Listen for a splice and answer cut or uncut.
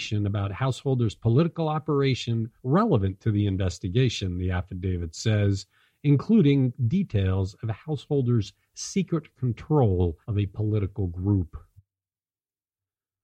cut